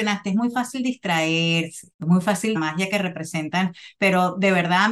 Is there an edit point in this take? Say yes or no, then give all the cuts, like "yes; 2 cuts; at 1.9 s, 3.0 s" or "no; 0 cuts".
yes; 2 cuts; at 1.9 s, 2.5 s